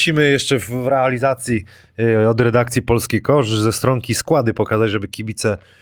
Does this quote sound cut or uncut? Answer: uncut